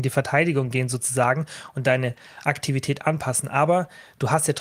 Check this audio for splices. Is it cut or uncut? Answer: uncut